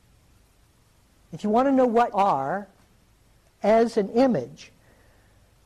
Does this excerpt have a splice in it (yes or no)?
yes